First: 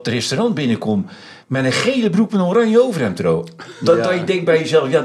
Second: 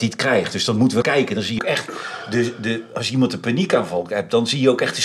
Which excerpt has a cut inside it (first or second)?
second